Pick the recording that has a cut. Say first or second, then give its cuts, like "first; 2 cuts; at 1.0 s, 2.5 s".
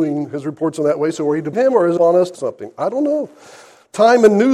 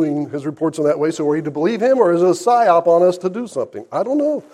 first; 3 cuts; at 1.5 s, 2.0 s, 2.3 s